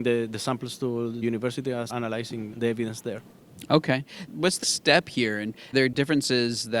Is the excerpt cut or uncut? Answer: cut